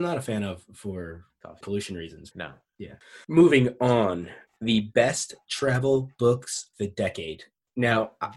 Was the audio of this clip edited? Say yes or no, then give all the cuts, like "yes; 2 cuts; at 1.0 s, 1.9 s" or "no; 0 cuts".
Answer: yes; 4 cuts; at 1.6 s, 2.3 s, 3.2 s, 6.7 s